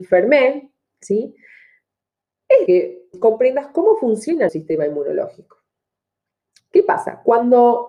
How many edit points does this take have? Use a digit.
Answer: 3